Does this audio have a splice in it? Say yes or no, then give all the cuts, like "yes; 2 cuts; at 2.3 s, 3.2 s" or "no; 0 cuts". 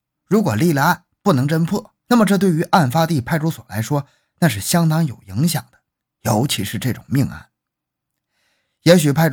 no; 0 cuts